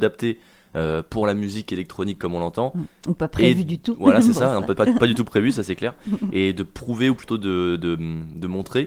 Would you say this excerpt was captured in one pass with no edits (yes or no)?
yes